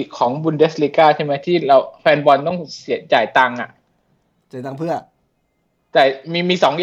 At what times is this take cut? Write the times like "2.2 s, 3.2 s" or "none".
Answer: none